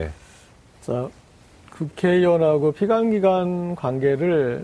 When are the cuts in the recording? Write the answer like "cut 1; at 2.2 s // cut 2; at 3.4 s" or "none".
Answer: none